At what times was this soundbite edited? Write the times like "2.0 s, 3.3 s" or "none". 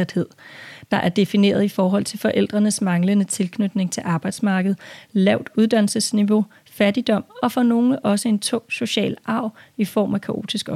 none